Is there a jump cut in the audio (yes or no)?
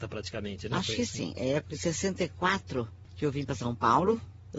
no